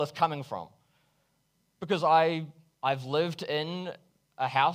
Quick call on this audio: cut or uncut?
uncut